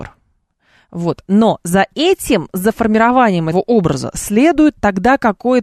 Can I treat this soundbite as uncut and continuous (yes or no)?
no